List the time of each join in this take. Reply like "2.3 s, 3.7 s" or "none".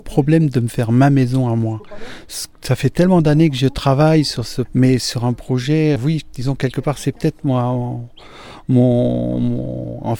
2.5 s, 4.6 s, 6.0 s